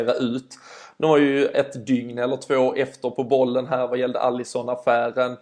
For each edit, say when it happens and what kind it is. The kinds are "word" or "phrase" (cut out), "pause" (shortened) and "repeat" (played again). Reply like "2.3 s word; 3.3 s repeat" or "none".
none